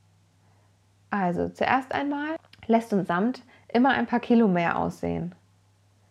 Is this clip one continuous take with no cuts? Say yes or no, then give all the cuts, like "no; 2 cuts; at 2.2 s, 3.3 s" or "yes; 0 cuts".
yes; 0 cuts